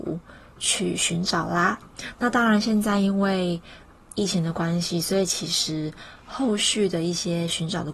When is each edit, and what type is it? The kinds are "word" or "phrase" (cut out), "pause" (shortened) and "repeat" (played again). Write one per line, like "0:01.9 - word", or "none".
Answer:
none